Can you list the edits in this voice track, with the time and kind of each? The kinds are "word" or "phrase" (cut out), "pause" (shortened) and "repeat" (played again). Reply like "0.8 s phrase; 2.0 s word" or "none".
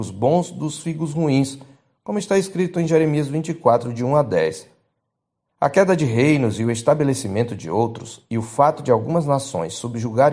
none